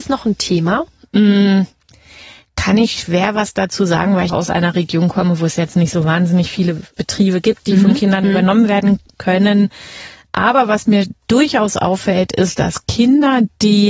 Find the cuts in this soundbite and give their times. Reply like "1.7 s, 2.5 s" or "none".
4.3 s, 6.9 s